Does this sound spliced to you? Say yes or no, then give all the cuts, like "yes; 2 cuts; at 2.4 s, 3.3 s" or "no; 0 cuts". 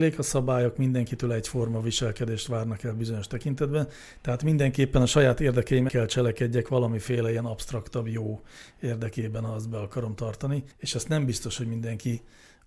yes; 2 cuts; at 5.9 s, 10.7 s